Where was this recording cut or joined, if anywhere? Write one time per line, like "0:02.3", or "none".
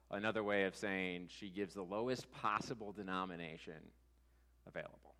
none